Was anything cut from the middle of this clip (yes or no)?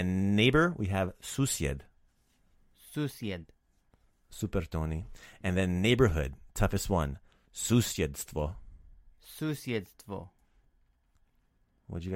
no